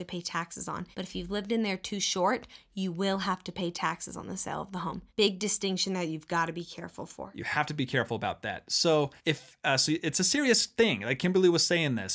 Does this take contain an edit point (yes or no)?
yes